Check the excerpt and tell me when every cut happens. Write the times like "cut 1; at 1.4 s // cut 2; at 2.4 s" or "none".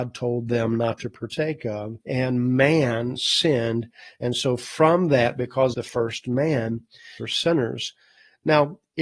cut 1; at 2.0 s // cut 2; at 5.7 s // cut 3; at 7.2 s